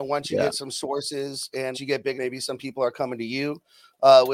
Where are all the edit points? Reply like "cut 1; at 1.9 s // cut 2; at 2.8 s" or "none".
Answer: cut 1; at 1.7 s // cut 2; at 2.1 s